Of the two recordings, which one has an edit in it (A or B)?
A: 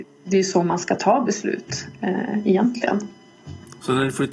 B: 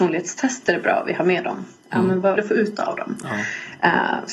B